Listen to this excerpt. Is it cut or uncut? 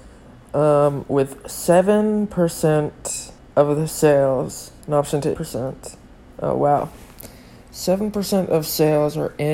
cut